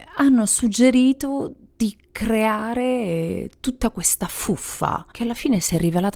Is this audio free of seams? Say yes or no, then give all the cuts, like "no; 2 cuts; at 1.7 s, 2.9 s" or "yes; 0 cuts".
no; 1 cut; at 5.1 s